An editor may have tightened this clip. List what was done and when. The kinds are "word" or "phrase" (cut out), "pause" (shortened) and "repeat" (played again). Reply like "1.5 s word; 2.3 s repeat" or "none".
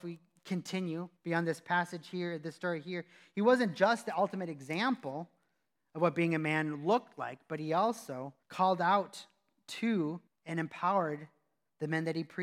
1.2 s pause; 8.4 s pause; 10.3 s pause